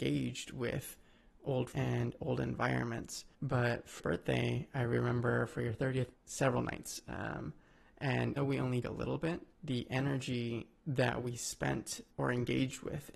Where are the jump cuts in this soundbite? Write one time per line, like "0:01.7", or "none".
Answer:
0:01.7
0:03.3
0:04.0
0:06.1
0:08.4
0:08.8
0:09.5
0:10.8

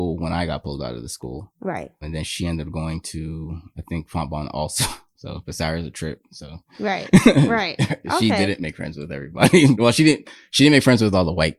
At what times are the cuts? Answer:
0:02.0
0:09.7

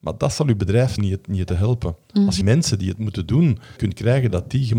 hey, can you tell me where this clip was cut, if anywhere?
0:01.0
0:01.5
0:02.4
0:03.8

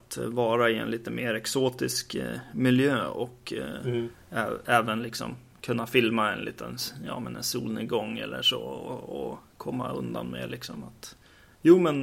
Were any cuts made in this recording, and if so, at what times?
none

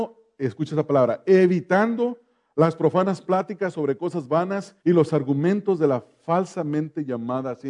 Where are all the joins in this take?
0:04.8

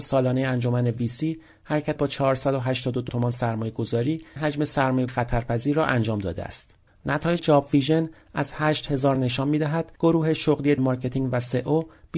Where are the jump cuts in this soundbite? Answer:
0:02.0
0:03.1
0:04.4
0:05.1
0:07.4
0:09.1
0:10.0
0:10.8

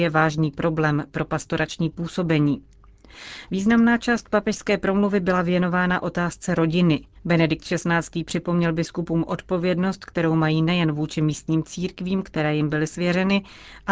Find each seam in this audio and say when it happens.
0:07.2

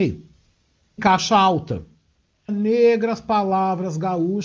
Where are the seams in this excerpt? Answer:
0:01.0
0:02.5

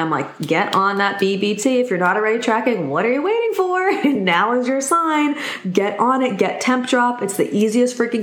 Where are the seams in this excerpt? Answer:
none

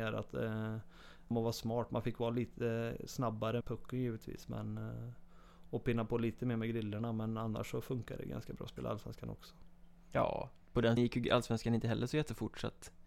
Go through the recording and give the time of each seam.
0:01.3
0:03.6
0:11.0

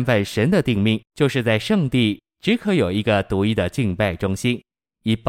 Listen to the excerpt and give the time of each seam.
0:01.0

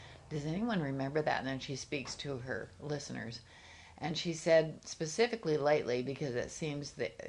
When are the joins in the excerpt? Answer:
none

